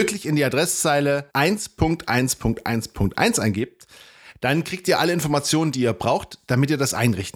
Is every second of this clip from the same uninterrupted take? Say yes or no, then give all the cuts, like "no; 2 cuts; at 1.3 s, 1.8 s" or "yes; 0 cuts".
no; 1 cut; at 1.3 s